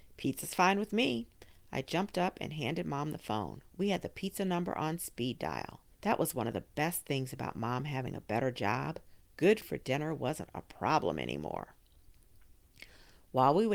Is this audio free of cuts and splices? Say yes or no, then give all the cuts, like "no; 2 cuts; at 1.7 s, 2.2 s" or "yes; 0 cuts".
no; 2 cuts; at 5.9 s, 9.6 s